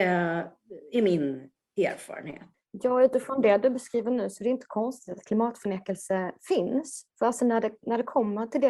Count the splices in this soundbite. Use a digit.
1